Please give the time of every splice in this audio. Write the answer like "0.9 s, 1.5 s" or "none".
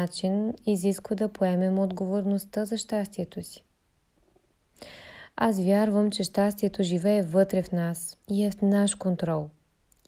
8.2 s